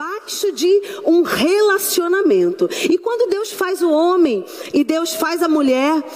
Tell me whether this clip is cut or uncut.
uncut